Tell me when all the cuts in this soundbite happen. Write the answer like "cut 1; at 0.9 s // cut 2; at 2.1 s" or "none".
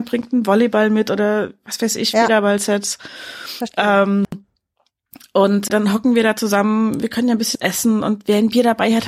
cut 1; at 5.7 s // cut 2; at 7.5 s